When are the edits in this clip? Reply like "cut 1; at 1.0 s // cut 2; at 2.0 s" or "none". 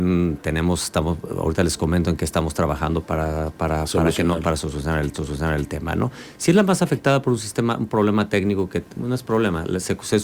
cut 1; at 5.1 s